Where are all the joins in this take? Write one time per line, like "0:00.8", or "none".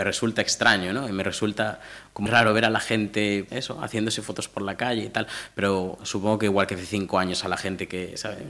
0:02.3
0:03.5